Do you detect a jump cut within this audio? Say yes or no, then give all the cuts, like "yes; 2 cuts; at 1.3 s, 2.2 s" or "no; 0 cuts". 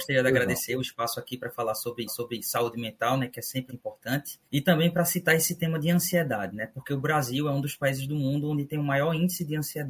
yes; 3 cuts; at 2.1 s, 3.7 s, 4.5 s